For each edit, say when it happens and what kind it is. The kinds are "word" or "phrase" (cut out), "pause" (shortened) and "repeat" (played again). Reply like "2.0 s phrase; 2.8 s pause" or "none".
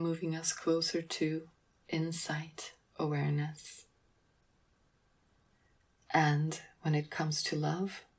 none